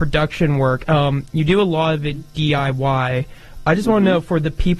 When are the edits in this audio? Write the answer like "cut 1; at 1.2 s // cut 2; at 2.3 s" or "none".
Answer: none